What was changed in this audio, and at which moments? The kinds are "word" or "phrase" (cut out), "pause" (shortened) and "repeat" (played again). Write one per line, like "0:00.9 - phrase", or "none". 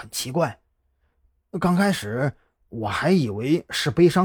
none